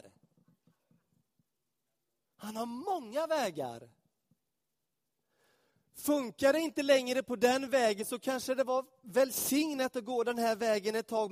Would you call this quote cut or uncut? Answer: uncut